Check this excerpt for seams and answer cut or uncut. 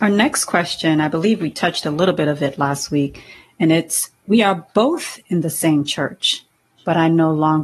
uncut